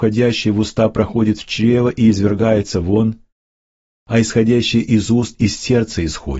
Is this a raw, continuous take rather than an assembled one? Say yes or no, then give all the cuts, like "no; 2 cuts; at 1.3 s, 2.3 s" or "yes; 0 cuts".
yes; 0 cuts